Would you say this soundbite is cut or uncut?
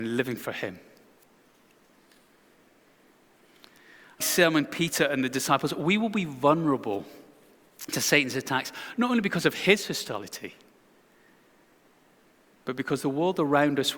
cut